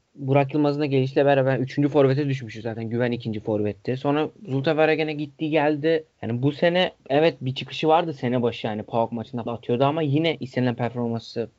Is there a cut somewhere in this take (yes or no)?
yes